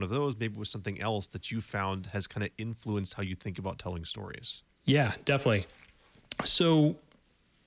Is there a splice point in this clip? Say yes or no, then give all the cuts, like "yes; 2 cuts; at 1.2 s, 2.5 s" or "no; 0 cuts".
yes; 1 cut; at 4.7 s